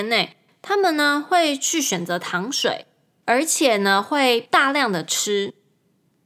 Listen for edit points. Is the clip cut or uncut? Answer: uncut